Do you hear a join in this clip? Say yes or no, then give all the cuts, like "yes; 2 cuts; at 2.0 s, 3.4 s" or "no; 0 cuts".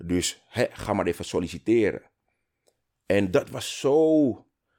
no; 0 cuts